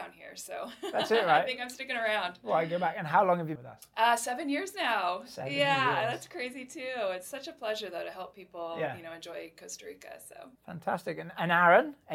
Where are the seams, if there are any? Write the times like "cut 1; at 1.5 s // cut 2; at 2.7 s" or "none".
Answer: cut 1; at 3.6 s // cut 2; at 10.6 s